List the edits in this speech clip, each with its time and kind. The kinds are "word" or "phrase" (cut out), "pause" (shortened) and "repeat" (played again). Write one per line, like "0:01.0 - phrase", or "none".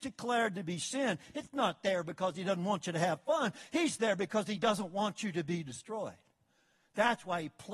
none